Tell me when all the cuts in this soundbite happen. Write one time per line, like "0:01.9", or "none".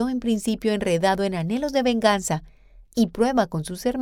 none